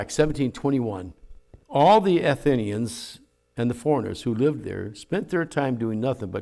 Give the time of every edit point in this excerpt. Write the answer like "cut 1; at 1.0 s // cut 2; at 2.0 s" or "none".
cut 1; at 1.6 s